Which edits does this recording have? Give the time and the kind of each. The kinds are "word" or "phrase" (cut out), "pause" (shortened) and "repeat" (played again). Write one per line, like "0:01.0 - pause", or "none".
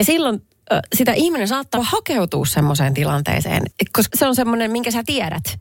0:01.8 - word
0:03.7 - word
0:04.1 - word